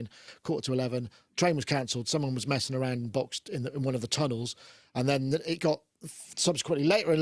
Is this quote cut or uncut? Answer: uncut